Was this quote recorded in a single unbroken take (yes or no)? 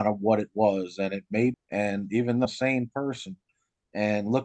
no